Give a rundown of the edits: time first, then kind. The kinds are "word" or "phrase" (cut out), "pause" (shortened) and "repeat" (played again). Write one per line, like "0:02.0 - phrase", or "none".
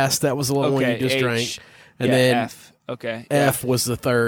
none